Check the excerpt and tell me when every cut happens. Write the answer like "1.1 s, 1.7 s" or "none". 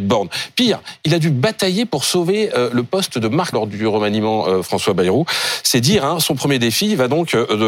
3.5 s